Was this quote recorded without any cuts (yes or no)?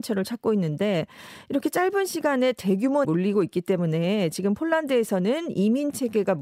no